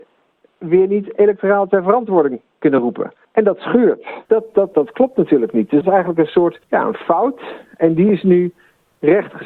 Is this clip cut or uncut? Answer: cut